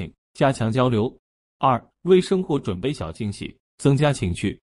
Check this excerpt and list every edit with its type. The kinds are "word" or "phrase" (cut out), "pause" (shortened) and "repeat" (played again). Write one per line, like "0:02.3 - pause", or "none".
0:01.9 - pause

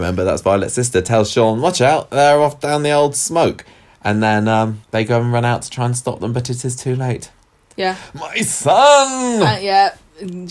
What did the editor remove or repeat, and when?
0:04.8 - pause

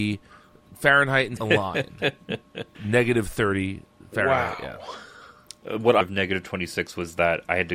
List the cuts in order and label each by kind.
0:01.4 - word
0:02.7 - word
0:06.0 - word

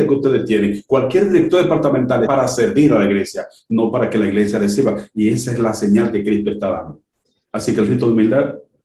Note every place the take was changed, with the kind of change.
0:02.3 - word

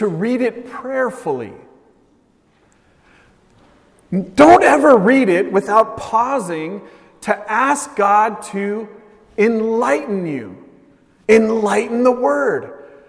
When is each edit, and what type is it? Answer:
none

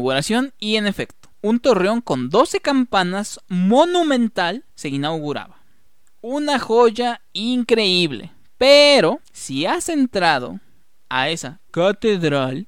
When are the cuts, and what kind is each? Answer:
0:01.3 - pause
0:04.7 - pause
0:05.9 - pause
0:09.2 - pause

